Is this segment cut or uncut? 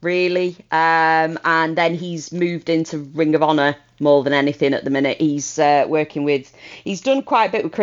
uncut